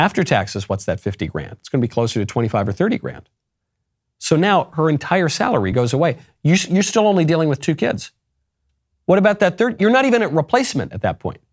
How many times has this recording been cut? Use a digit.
0